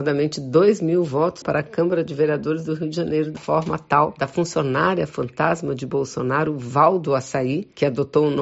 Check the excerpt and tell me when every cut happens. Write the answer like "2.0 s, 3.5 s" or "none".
1.4 s, 3.4 s